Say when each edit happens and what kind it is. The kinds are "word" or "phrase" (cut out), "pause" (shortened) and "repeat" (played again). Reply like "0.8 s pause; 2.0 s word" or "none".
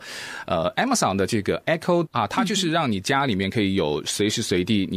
2.1 s word